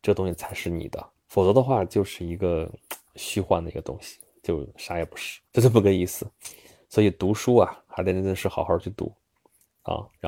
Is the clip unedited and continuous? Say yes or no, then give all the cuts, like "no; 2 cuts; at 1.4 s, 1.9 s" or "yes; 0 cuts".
no; 2 cuts; at 1.1 s, 5.4 s